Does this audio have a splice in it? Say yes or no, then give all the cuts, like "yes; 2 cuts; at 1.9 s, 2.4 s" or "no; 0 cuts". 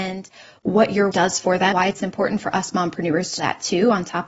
yes; 3 cuts; at 1.1 s, 1.7 s, 3.4 s